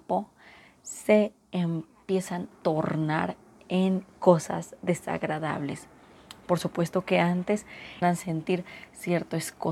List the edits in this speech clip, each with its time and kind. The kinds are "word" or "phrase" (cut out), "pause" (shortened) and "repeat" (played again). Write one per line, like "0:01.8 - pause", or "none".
0:02.5 - word
0:08.0 - word